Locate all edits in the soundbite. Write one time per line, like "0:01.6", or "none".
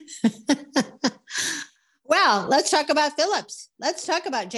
none